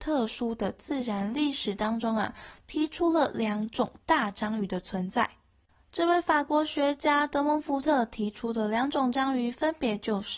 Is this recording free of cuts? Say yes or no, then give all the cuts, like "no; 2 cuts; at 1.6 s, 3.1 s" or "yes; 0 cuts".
yes; 0 cuts